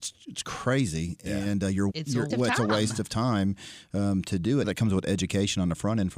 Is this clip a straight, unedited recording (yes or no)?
no